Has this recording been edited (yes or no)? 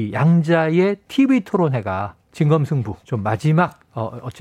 yes